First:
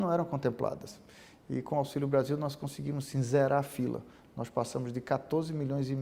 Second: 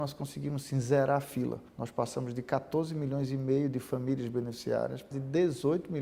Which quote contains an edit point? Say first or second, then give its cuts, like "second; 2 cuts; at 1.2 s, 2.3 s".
second; 2 cuts; at 1.7 s, 5.1 s